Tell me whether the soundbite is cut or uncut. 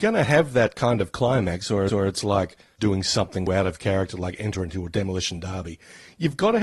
cut